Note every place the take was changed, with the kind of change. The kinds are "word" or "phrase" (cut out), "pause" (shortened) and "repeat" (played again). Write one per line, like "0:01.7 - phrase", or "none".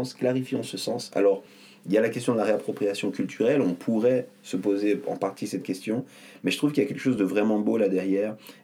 none